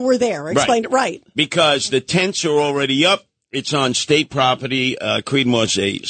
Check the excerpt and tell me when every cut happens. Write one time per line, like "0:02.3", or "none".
none